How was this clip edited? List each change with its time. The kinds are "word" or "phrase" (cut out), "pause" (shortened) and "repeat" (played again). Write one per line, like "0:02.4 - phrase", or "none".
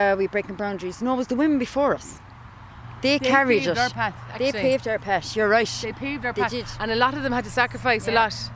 none